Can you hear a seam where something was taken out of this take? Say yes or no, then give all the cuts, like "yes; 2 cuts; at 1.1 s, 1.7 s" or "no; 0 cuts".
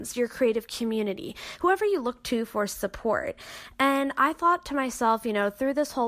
no; 0 cuts